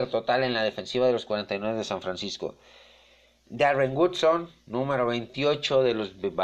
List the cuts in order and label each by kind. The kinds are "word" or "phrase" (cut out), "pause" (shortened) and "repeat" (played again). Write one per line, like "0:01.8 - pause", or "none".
none